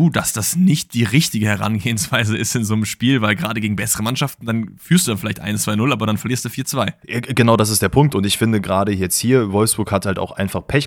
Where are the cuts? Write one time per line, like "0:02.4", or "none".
0:07.0